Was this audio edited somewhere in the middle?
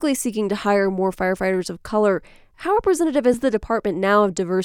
no; 0 cuts

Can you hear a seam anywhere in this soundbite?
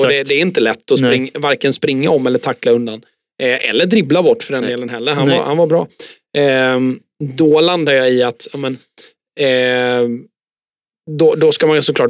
no; 0 cuts

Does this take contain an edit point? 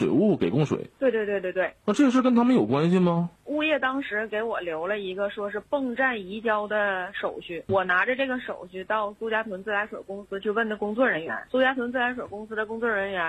yes; 1 cut; at 7.7 s

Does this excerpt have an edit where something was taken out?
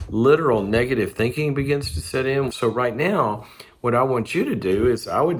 no; 0 cuts

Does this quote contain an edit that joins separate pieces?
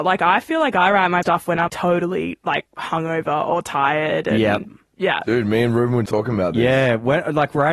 yes; 3 cuts; at 1.2 s, 1.7 s, 6.1 s

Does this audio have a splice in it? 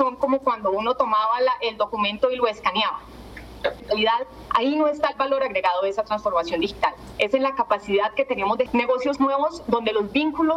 yes; 2 cuts; at 3.8 s, 8.7 s

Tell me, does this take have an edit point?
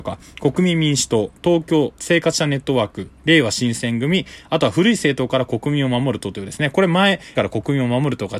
yes; 1 cut; at 7.3 s

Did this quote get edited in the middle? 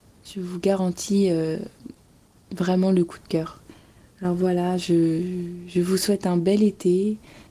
no; 0 cuts

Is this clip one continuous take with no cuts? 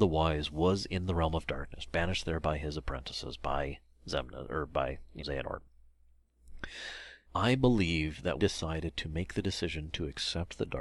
no; 3 cuts; at 5.2 s, 7.2 s, 8.4 s

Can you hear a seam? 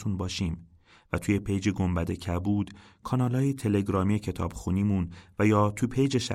no; 0 cuts

